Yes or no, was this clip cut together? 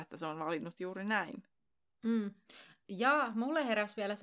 no